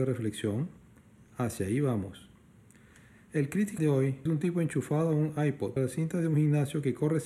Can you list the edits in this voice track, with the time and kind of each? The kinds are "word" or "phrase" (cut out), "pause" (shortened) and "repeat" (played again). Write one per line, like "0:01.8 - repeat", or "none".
0:03.8 - word
0:04.3 - word
0:05.8 - word